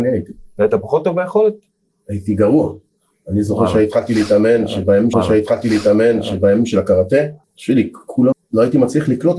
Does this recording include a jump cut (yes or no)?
yes